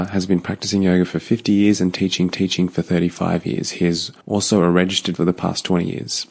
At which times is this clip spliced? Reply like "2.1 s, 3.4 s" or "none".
2.3 s, 4.2 s, 5.2 s

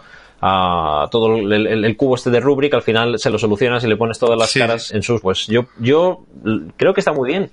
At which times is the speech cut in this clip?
4.9 s, 5.2 s

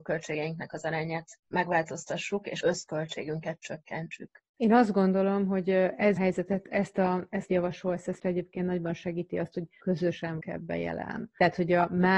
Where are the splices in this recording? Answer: 1.4 s, 2.6 s, 6.2 s, 7.5 s, 8.2 s, 10.4 s

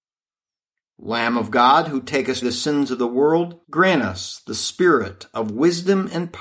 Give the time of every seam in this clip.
2.4 s, 3.6 s

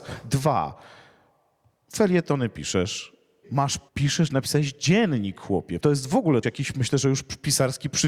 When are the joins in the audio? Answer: 3.4 s, 3.9 s, 5.8 s, 6.4 s

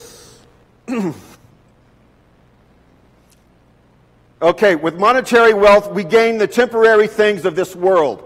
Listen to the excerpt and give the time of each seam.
1.3 s

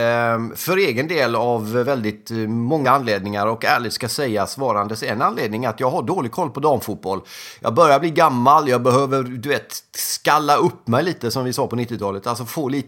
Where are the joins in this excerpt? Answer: 2.8 s

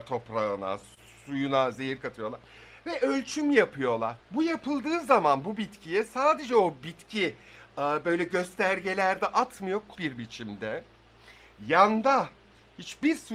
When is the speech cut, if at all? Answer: 4.2 s, 9.9 s

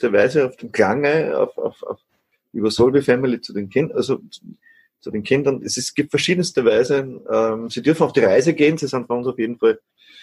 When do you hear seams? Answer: none

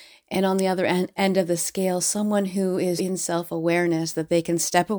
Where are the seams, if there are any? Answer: 3.0 s

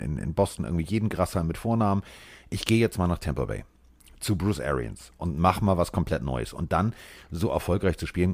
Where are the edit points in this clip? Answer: none

